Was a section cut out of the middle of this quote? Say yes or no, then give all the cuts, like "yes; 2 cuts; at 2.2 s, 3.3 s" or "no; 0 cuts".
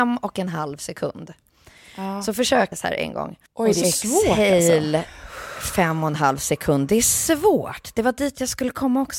yes; 3 cuts; at 2.7 s, 3.5 s, 3.8 s